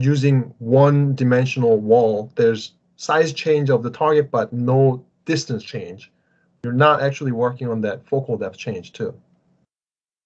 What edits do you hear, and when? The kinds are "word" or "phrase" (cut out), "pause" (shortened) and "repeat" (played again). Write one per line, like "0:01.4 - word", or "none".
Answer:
none

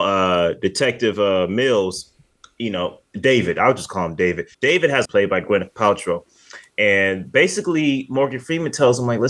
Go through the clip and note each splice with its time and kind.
0:04.5 - pause
0:05.1 - phrase

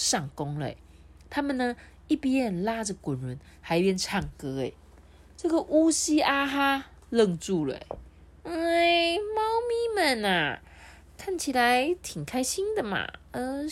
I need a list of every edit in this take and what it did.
none

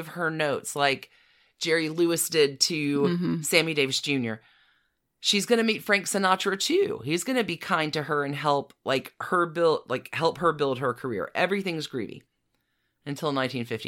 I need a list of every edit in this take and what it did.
none

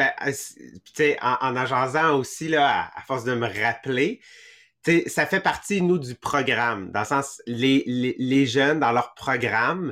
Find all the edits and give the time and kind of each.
none

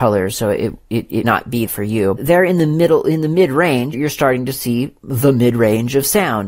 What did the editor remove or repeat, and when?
0:01.2 - word
0:01.7 - word
0:02.2 - phrase
0:03.9 - word

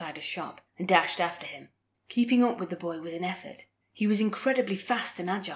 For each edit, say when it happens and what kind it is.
none

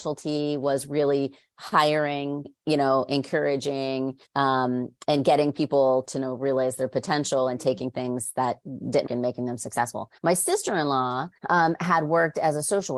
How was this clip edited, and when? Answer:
0:02.4 - word
0:04.3 - pause
0:06.0 - word
0:09.1 - word
0:10.2 - pause
0:11.4 - pause

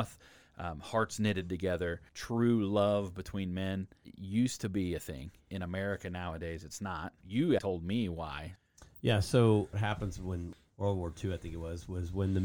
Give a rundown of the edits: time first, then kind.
0:02.1 - pause
0:07.6 - word
0:09.7 - phrase

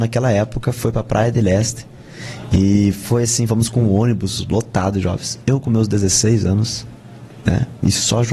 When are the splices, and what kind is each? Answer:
none

